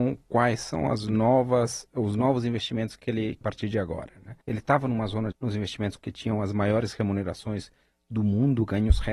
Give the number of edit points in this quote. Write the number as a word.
four